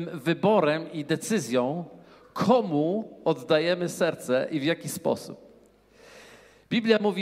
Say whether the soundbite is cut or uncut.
uncut